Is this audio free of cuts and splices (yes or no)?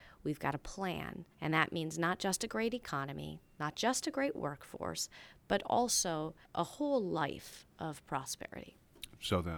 no